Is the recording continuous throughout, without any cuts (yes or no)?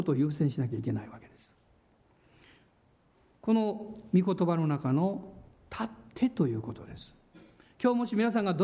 yes